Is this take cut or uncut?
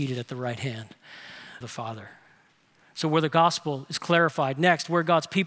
cut